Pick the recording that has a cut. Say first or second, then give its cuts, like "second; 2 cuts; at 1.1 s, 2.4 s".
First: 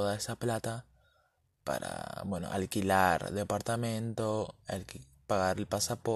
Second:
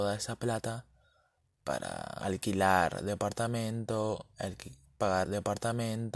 second; 2 cuts; at 2.2 s, 5.3 s